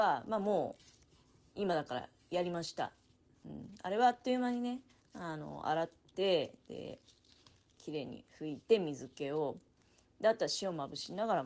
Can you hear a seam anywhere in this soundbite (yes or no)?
no